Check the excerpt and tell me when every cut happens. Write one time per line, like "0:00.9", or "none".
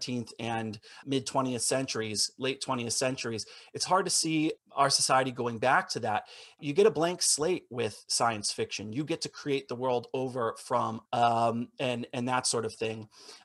0:01.0
0:04.6
0:06.6
0:11.1